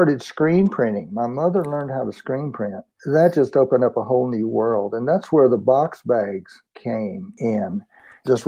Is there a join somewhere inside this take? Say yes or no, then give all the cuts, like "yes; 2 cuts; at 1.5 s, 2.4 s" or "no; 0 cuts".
no; 0 cuts